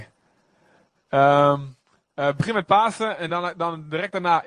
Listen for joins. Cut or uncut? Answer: uncut